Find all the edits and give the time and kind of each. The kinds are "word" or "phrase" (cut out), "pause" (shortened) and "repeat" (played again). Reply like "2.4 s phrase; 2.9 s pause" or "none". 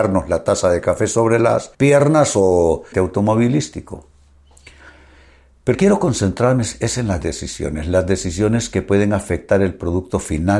1.7 s pause; 2.9 s phrase; 5.7 s word; 7.2 s word